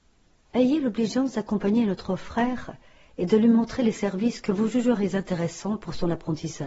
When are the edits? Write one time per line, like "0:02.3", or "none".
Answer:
none